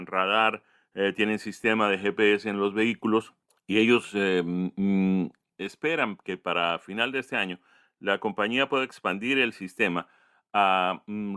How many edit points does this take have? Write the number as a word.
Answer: zero